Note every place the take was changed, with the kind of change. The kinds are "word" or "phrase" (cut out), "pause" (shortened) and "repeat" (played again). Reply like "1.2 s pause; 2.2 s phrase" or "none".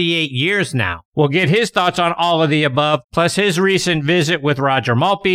1.1 s pause; 3.0 s pause